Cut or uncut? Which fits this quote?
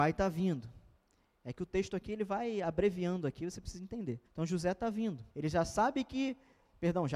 cut